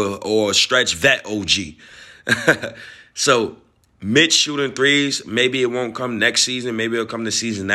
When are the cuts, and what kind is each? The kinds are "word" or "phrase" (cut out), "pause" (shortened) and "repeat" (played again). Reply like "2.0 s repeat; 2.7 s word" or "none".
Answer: none